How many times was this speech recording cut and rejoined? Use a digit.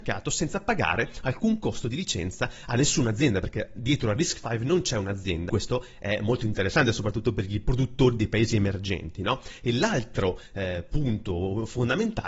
0